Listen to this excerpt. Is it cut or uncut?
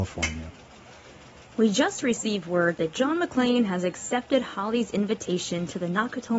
uncut